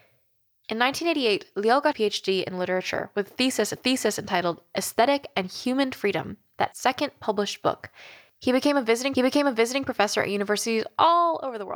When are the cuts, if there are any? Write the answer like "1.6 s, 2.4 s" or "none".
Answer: 1.9 s, 3.8 s, 6.7 s, 9.1 s